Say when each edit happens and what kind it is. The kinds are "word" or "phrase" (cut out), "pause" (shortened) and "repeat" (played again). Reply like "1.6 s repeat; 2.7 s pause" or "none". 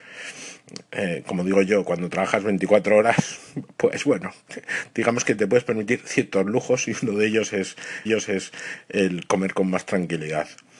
8.1 s repeat